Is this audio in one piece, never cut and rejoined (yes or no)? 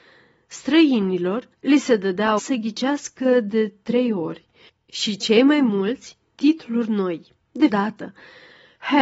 no